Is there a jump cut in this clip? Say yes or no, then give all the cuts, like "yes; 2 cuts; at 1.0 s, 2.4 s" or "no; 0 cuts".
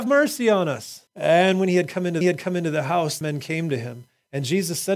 yes; 3 cuts; at 1.1 s, 2.2 s, 3.2 s